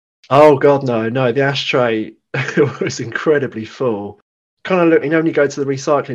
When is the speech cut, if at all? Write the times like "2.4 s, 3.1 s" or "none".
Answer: 5.0 s